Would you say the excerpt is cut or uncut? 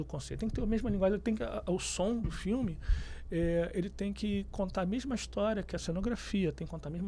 uncut